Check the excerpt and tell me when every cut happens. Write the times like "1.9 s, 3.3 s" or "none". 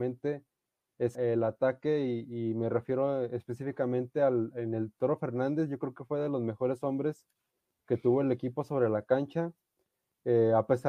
1.1 s